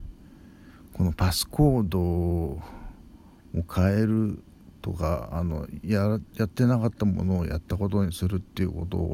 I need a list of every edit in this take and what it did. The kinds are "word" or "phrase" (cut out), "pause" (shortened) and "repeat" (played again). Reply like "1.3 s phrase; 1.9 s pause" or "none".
none